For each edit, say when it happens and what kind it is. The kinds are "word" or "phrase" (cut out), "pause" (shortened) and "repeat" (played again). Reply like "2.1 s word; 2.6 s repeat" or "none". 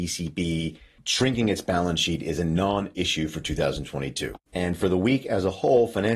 4.4 s pause